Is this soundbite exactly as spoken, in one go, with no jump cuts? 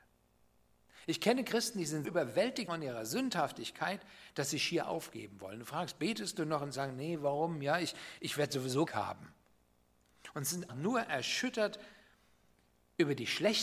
no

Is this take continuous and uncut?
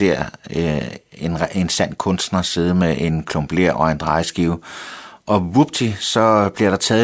yes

